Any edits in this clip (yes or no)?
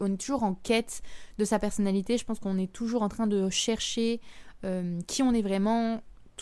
no